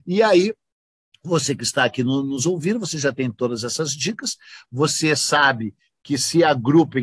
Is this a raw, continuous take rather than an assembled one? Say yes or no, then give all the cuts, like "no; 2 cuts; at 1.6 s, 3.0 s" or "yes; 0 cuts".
yes; 0 cuts